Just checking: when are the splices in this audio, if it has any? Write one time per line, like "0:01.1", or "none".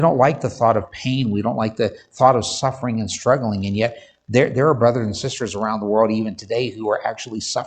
none